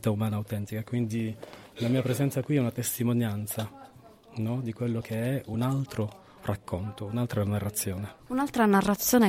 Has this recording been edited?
no; 0 cuts

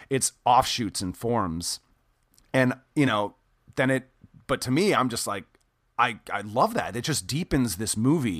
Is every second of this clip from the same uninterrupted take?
yes; 0 cuts

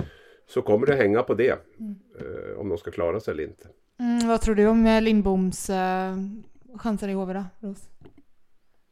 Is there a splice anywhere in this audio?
no; 0 cuts

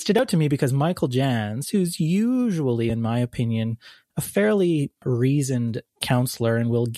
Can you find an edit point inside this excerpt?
no; 0 cuts

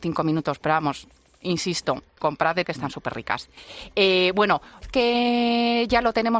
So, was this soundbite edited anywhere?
yes; 3 cuts; at 2.2 s, 2.6 s, 4.8 s

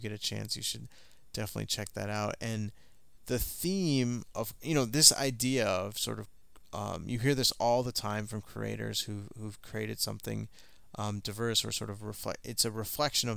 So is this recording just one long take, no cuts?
yes; 0 cuts

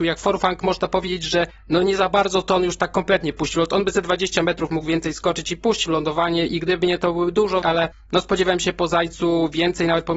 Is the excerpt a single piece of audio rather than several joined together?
no; 1 cut; at 7.6 s

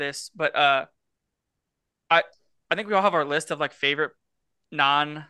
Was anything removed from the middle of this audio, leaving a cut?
no; 0 cuts

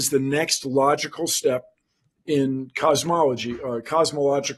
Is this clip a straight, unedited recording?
yes; 0 cuts

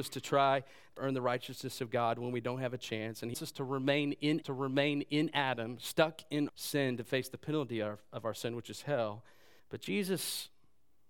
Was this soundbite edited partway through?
yes; 5 cuts; at 1.0 s, 3.3 s, 4.4 s, 6.5 s, 9.6 s

